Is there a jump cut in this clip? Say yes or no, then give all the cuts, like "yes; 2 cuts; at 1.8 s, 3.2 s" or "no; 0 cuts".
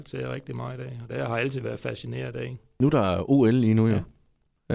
no; 0 cuts